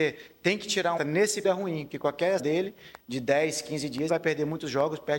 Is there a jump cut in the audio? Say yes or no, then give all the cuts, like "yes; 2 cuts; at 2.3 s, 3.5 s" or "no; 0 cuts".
yes; 4 cuts; at 1.0 s, 1.4 s, 2.4 s, 4.1 s